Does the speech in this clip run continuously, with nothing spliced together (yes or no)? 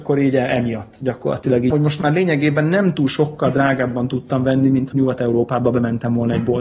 no